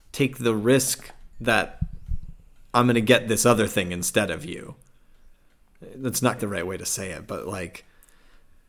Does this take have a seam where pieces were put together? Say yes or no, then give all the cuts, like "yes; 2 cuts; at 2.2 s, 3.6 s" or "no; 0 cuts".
yes; 1 cut; at 6.4 s